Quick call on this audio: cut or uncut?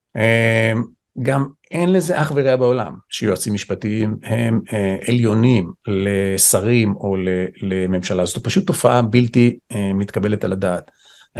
uncut